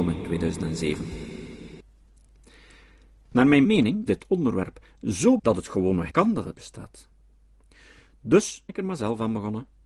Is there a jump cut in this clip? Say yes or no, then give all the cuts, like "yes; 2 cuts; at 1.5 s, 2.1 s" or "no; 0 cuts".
yes; 6 cuts; at 3.6 s, 4.1 s, 5.4 s, 6.1 s, 6.5 s, 8.7 s